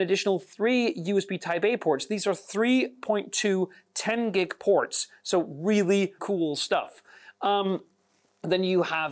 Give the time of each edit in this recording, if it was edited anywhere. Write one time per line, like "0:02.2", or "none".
0:06.2

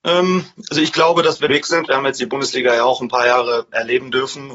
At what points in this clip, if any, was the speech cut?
0:01.5

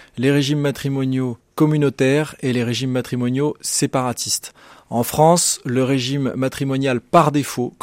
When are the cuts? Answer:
none

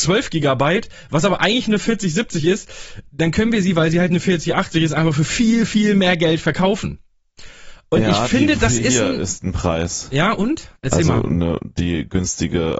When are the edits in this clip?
0:10.8

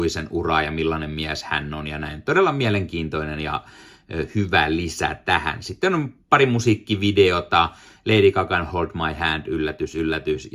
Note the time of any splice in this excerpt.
none

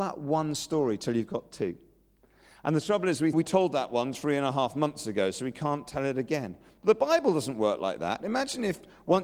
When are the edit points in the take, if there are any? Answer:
0:03.3

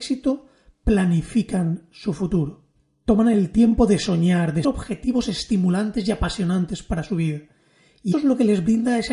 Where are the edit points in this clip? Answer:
0:04.6
0:08.1

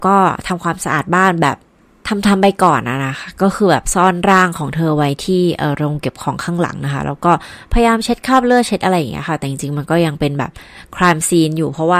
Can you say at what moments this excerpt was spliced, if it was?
none

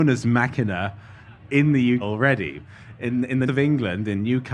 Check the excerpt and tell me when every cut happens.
0:02.0
0:03.5

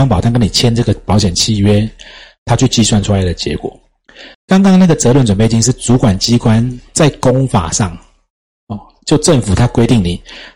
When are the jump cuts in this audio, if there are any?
0:04.3

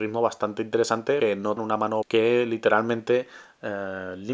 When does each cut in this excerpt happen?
0:01.2
0:01.6
0:02.0

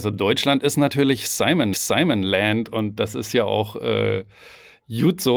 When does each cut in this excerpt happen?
0:01.7

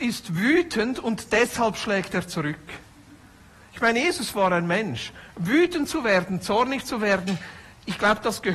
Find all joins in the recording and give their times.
none

